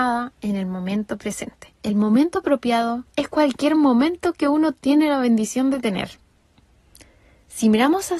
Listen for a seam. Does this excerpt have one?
yes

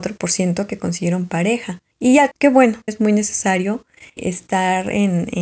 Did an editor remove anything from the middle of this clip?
yes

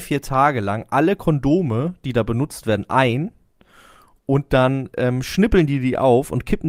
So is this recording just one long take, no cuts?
yes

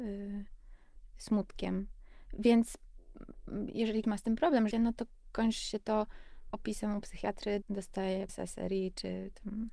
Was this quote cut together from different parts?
yes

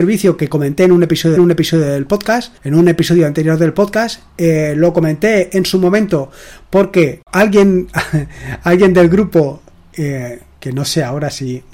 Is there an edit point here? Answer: yes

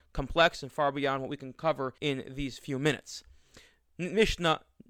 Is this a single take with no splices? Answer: no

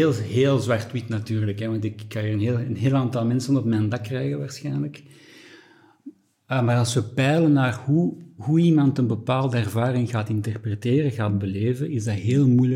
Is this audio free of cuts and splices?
yes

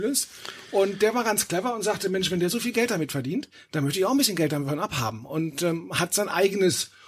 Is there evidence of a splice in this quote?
no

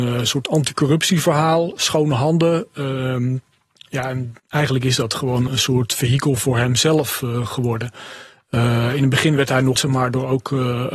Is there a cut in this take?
yes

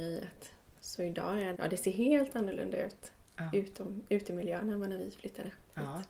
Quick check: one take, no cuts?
no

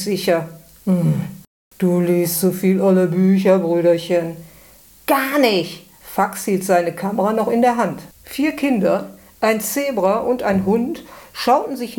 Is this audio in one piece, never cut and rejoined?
no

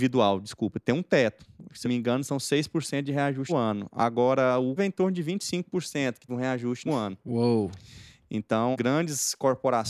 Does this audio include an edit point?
yes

